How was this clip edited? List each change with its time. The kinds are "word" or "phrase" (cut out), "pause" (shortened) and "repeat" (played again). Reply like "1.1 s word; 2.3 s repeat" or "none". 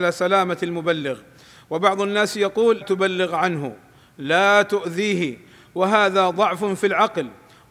2.8 s word